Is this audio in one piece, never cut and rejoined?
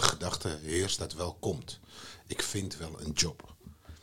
no; 1 cut; at 1.0 s

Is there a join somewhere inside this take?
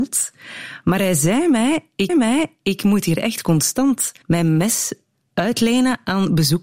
yes; 2 cuts; at 2.1 s, 4.2 s

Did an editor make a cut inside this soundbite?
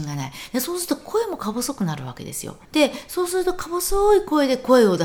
yes; 1 cut; at 2.6 s

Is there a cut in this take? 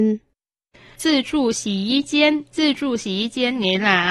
yes; 1 cut; at 2.5 s

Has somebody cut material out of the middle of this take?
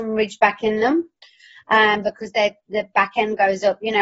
no; 0 cuts

